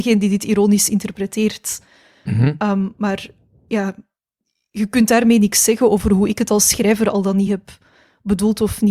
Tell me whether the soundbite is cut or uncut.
uncut